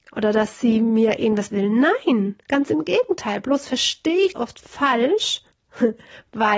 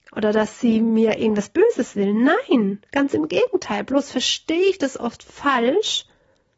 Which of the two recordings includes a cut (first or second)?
first